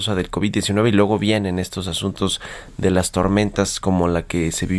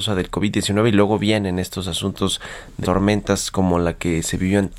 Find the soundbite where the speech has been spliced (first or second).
second